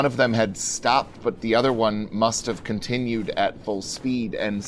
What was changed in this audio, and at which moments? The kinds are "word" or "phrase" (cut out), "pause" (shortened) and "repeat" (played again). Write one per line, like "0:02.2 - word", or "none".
none